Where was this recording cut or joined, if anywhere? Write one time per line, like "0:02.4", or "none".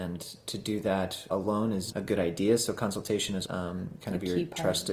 0:01.3
0:01.9
0:03.4